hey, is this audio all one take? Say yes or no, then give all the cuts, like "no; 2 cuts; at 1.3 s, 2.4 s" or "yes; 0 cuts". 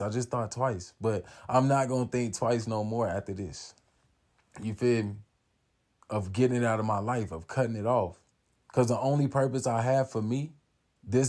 no; 1 cut; at 8.4 s